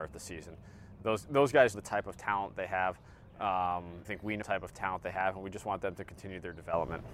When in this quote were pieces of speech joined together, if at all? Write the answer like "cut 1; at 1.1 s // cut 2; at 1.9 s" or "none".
cut 1; at 1.7 s // cut 2; at 4.0 s // cut 3; at 4.4 s